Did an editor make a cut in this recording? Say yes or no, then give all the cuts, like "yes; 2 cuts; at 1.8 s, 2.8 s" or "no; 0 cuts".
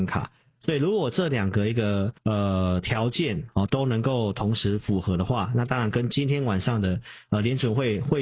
yes; 1 cut; at 2.2 s